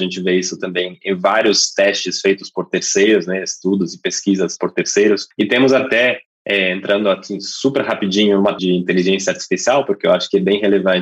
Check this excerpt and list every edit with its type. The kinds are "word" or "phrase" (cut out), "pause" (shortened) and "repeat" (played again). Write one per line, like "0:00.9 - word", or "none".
0:04.6 - word
0:08.6 - word